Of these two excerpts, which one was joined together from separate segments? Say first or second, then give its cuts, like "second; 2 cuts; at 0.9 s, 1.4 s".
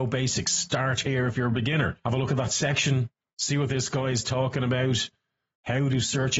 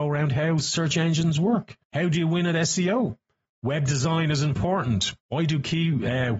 second; 3 cuts; at 1.8 s, 3.5 s, 5.2 s